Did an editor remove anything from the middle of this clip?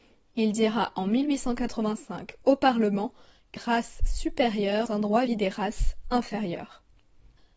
yes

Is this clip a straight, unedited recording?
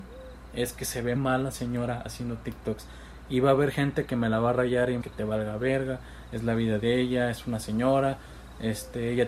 no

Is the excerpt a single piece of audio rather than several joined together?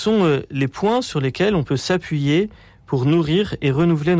yes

